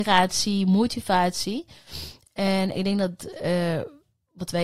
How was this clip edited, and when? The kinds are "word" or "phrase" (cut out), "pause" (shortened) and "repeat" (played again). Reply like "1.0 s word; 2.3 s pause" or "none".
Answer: none